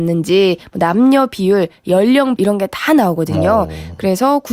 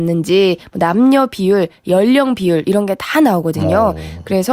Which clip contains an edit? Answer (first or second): first